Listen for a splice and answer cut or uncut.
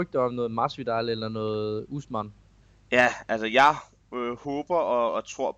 uncut